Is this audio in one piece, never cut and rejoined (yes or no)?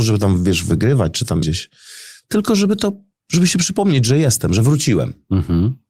no